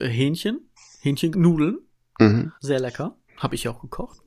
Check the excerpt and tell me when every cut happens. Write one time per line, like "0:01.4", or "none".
0:01.3
0:02.6
0:03.3